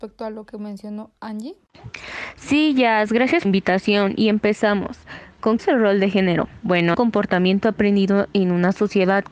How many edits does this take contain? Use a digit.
3